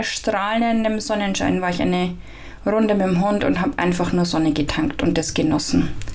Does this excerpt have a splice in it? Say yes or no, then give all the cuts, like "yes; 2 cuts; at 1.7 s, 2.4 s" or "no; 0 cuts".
no; 0 cuts